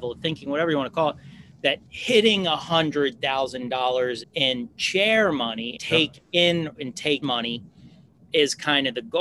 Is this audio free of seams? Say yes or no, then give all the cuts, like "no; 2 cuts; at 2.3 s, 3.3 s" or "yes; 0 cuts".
no; 4 cuts; at 4.2 s, 5.7 s, 6.7 s, 7.2 s